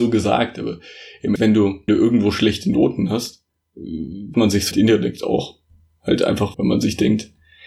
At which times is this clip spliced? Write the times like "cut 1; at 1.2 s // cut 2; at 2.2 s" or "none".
cut 1; at 1.4 s // cut 2; at 1.9 s // cut 3; at 4.3 s // cut 4; at 4.7 s // cut 5; at 6.5 s